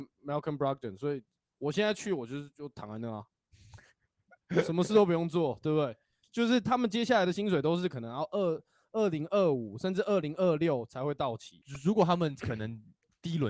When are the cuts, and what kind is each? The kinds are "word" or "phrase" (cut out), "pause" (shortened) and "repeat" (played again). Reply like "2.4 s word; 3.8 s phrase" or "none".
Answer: none